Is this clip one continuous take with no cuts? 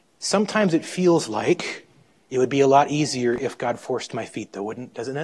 yes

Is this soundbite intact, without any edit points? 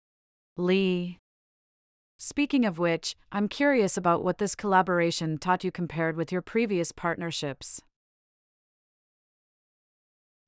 yes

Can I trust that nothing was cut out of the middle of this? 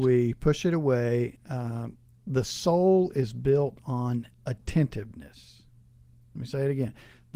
yes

